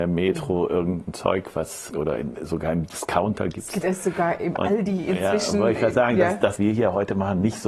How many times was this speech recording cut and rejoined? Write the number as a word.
three